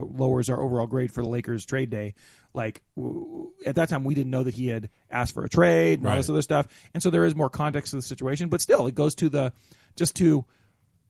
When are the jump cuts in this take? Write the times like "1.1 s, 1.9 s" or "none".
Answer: none